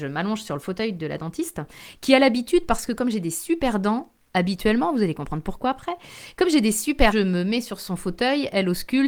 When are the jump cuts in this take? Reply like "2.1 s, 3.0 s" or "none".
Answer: 7.1 s